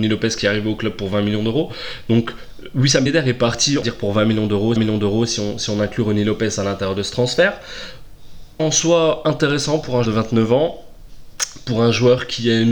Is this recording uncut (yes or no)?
no